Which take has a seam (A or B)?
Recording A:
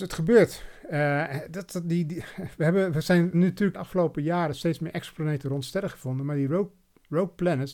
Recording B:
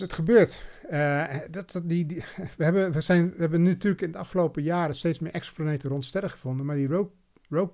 A